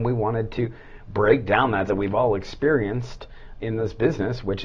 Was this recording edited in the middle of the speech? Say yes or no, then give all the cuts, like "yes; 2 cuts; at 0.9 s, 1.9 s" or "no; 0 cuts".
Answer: yes; 2 cuts; at 1.9 s, 3.6 s